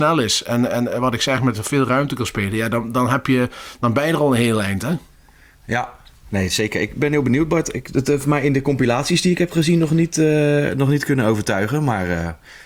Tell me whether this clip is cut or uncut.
uncut